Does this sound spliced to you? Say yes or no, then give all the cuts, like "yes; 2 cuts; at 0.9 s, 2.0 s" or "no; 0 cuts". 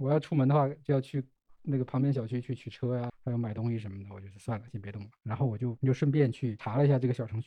yes; 1 cut; at 3.1 s